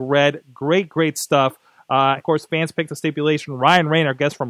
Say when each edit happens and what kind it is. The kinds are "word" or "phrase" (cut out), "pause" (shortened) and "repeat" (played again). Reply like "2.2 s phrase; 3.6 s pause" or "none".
2.2 s word